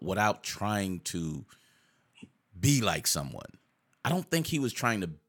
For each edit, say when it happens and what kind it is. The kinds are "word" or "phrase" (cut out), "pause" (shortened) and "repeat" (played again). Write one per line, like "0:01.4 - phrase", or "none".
none